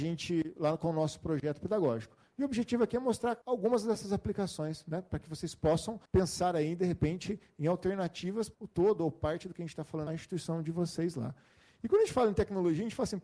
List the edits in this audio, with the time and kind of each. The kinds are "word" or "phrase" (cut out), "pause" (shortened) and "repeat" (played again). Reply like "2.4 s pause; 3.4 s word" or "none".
3.4 s pause; 6.1 s pause; 8.5 s word; 10.1 s phrase